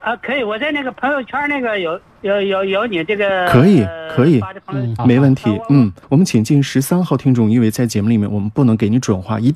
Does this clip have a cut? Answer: yes; 3 cuts; at 2.1 s, 5.0 s, 6.0 s

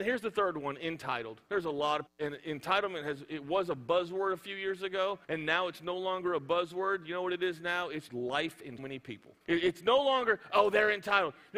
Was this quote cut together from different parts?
yes; 6 cuts; at 1.4 s, 2.1 s, 5.2 s, 8.1 s, 8.8 s, 9.4 s

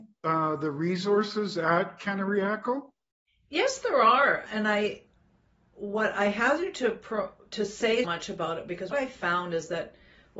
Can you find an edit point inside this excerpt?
yes; 3 cuts; at 4.5 s, 8.0 s, 8.9 s

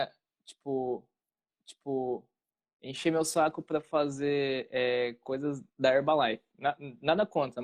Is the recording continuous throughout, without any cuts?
no; 2 cuts; at 1.5 s, 5.7 s

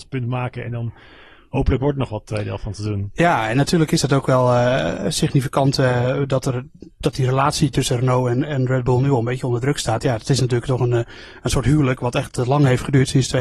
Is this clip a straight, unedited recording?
yes; 0 cuts

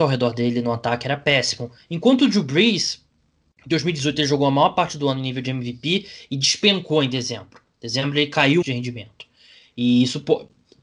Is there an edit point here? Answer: yes; 1 cut; at 8.6 s

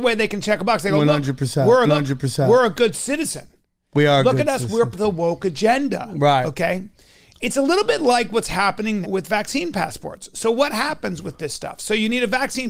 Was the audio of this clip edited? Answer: yes; 3 cuts; at 1.8 s, 4.9 s, 9.0 s

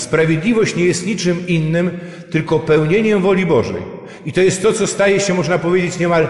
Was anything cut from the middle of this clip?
no; 0 cuts

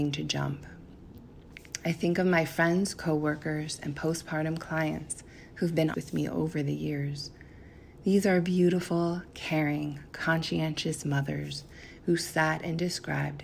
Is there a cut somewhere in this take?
yes; 1 cut; at 5.9 s

